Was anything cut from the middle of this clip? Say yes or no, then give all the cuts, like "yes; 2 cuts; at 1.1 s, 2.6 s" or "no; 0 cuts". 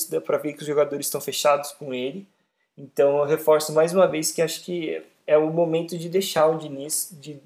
no; 0 cuts